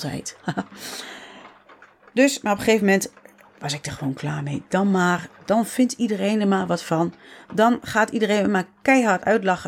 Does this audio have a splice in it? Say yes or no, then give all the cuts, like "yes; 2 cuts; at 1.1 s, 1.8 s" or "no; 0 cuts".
no; 0 cuts